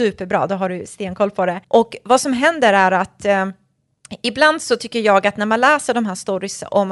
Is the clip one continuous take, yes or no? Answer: no